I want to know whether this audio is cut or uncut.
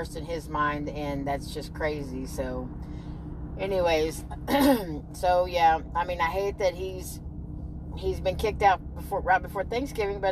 uncut